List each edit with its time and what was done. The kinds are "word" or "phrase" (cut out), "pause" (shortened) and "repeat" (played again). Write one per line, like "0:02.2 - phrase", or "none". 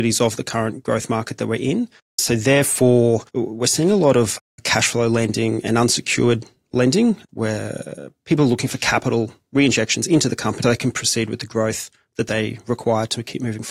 0:02.0 - pause
0:03.3 - pause
0:07.3 - word
0:10.6 - word